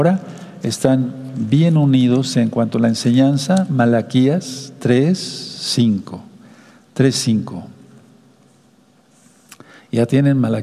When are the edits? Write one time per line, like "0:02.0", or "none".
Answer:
none